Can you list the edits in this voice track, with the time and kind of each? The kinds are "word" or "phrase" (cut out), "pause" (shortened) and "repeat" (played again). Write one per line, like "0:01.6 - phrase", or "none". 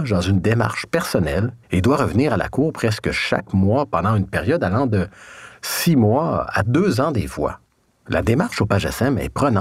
0:01.6 - pause